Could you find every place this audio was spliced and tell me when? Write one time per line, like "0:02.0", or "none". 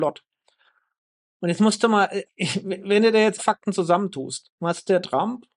0:02.2
0:03.4